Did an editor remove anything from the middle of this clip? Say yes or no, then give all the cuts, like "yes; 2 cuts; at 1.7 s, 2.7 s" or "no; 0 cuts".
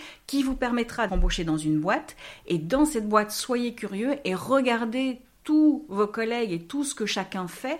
yes; 1 cut; at 1.1 s